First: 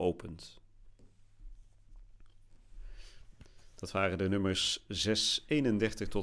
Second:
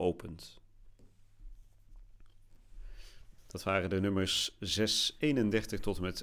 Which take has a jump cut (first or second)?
second